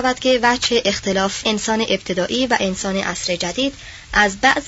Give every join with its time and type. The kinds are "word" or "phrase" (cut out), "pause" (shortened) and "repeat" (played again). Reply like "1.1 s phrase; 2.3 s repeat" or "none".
1.4 s word